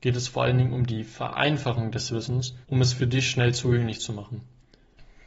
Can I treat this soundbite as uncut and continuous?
no; 1 cut; at 2.6 s

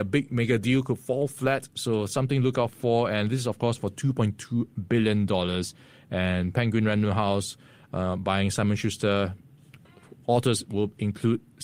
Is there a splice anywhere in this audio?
no; 0 cuts

